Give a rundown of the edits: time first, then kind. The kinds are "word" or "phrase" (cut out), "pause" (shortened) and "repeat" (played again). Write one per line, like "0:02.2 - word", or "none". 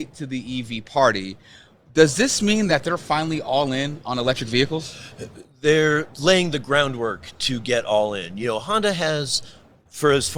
none